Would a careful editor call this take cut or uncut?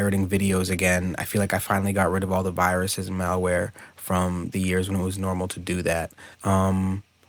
cut